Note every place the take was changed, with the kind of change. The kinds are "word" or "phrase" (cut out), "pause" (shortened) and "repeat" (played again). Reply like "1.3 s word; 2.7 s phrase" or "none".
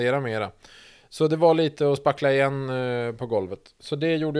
none